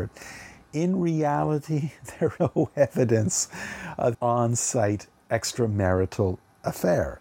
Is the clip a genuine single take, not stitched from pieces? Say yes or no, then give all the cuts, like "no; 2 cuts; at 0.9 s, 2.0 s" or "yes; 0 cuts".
no; 2 cuts; at 2.4 s, 4.1 s